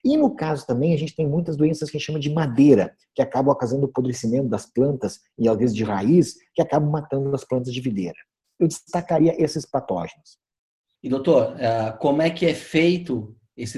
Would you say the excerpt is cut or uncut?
uncut